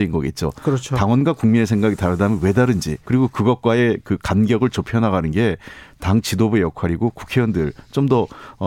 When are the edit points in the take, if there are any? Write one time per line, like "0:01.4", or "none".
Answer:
0:03.0